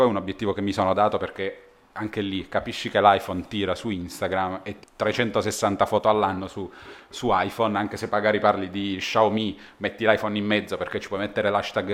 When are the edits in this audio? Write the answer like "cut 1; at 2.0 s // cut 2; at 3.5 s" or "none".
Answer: cut 1; at 4.8 s